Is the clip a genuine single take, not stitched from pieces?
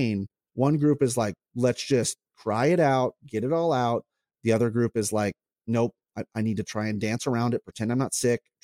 yes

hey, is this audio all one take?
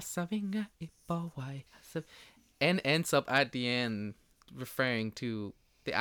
no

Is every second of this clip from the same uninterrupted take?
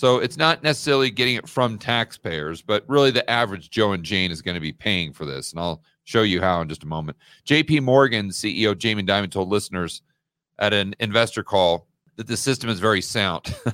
yes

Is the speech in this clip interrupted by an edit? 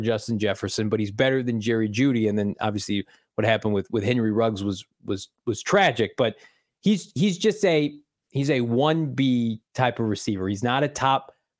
no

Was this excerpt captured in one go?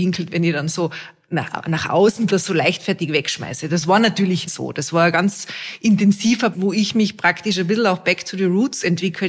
no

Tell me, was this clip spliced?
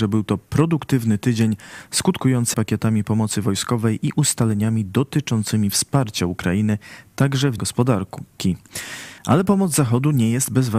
yes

